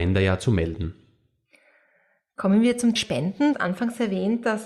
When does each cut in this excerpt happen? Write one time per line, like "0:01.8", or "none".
0:03.0
0:03.5